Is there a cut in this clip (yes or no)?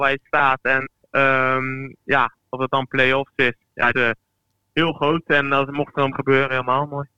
yes